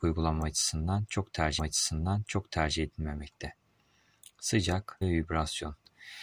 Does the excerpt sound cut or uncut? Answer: cut